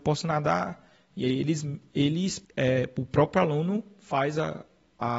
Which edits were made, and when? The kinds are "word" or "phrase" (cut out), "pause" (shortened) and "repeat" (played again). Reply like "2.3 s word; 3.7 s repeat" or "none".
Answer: 2.4 s pause